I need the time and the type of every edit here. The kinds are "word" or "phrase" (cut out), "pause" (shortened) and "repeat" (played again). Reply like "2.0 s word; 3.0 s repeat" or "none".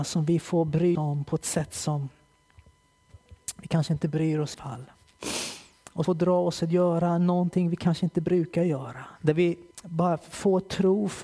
0.9 s word; 4.5 s phrase; 6.0 s word; 9.2 s pause; 9.7 s pause